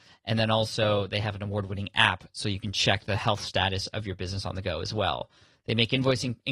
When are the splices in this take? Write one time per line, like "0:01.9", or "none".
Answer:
none